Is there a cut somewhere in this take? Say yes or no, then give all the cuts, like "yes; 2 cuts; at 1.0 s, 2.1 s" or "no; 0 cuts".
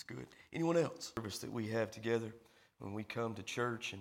no; 0 cuts